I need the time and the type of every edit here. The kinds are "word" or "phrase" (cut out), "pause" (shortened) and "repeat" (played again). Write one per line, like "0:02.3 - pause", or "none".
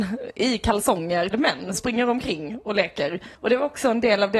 0:01.3 - word
0:01.7 - word
0:03.4 - pause